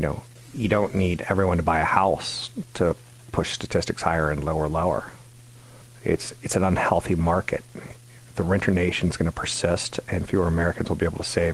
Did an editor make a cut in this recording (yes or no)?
no